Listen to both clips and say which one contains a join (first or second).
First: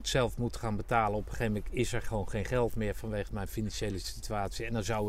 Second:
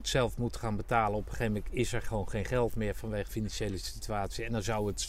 second